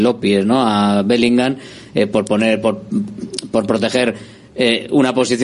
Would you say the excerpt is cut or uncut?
uncut